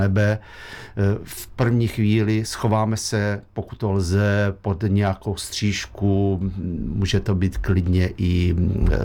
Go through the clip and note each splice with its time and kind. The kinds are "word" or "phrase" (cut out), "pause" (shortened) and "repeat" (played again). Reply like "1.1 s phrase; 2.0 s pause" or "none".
none